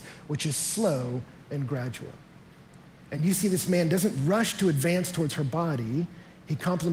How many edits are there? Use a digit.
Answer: 0